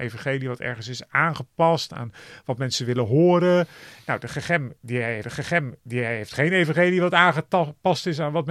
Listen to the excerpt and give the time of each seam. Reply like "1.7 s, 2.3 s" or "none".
5.2 s

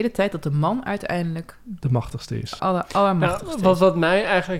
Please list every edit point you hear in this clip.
2.6 s

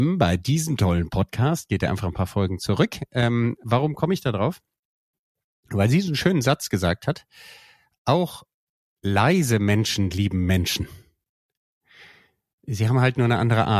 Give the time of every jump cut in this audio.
none

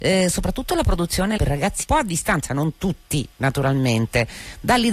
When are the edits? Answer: 1.4 s, 1.8 s

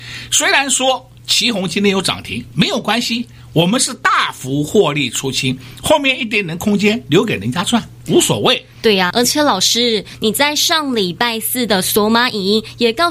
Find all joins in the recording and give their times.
9.1 s

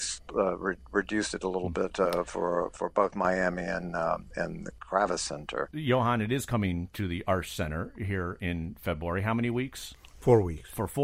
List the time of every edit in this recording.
none

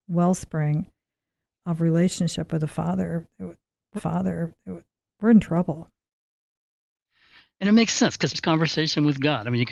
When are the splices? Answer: 4.0 s, 8.3 s

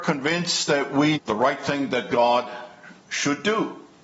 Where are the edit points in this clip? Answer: 1.1 s, 3.0 s

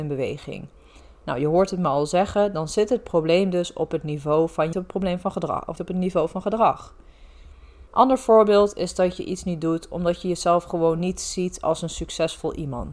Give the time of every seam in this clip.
4.7 s, 5.8 s, 7.9 s

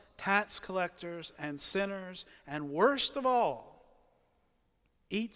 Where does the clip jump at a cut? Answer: none

